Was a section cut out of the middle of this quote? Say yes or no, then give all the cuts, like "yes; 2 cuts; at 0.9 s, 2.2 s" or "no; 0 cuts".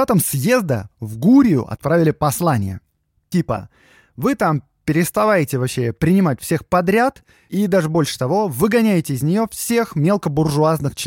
no; 0 cuts